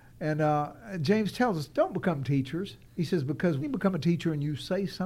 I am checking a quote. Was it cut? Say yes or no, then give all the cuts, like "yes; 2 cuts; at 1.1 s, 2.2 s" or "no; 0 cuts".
yes; 2 cuts; at 2.9 s, 3.6 s